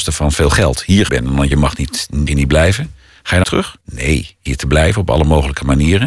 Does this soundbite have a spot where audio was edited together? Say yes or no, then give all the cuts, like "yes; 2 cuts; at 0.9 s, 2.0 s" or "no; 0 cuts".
yes; 6 cuts; at 1.1 s, 1.5 s, 2.3 s, 3.4 s, 3.8 s, 4.5 s